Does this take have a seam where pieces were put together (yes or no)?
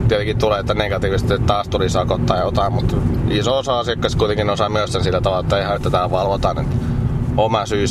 yes